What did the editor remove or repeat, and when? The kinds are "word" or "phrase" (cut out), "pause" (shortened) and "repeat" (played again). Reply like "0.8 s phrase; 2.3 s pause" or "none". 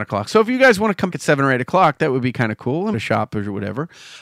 1.1 s word; 2.9 s phrase